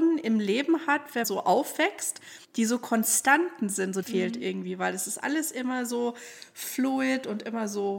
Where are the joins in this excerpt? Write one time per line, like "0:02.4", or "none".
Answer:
0:01.2
0:02.4
0:04.0